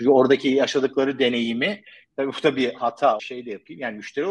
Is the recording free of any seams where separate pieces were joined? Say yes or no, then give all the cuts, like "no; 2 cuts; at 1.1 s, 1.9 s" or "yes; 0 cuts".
no; 1 cut; at 3.2 s